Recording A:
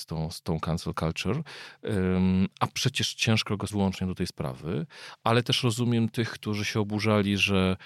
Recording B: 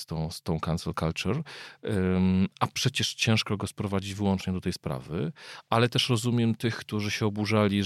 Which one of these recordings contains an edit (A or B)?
A